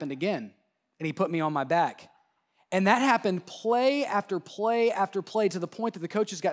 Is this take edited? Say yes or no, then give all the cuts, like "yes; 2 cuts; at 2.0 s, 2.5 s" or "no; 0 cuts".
no; 0 cuts